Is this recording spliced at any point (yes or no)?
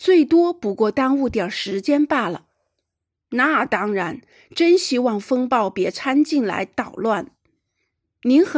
no